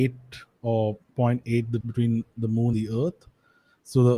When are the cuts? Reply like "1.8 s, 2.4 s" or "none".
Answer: 1.0 s, 1.8 s, 2.7 s

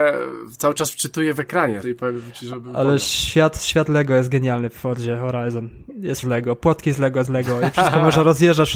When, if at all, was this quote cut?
1.8 s, 6.2 s, 7.2 s

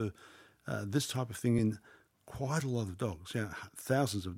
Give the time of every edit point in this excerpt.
none

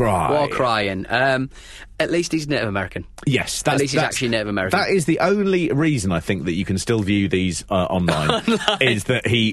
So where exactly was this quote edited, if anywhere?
none

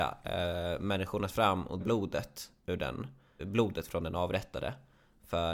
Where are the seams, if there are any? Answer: 1.3 s, 1.8 s, 3.4 s

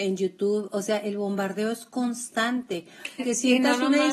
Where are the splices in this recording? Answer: 3.2 s

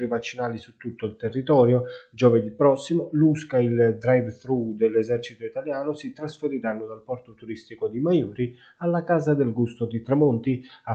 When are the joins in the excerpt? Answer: none

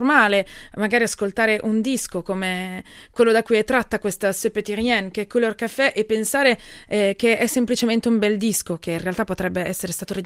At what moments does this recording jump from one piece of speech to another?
none

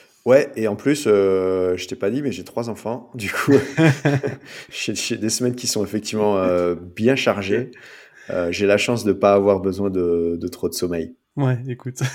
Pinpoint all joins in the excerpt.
11.2 s

